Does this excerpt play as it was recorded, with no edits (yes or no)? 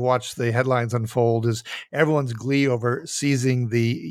yes